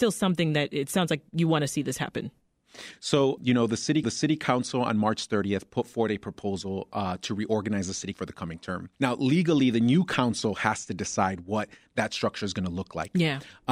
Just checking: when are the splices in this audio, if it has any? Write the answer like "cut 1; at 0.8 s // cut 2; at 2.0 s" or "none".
cut 1; at 3.4 s // cut 2; at 4.0 s // cut 3; at 8.1 s // cut 4; at 8.9 s